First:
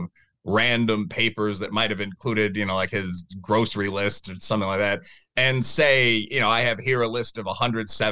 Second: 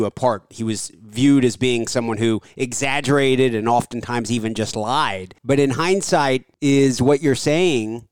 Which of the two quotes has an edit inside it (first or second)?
second